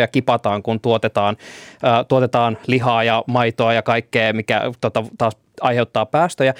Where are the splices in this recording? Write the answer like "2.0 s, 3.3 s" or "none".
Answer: none